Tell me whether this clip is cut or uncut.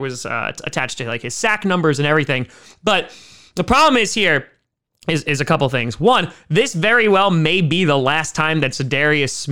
uncut